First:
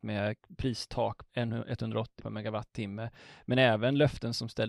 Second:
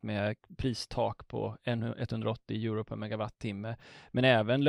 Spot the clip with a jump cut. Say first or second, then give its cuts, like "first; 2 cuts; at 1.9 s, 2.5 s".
first; 2 cuts; at 1.3 s, 2.2 s